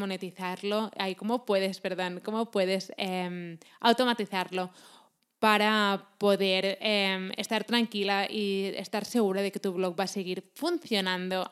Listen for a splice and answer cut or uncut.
uncut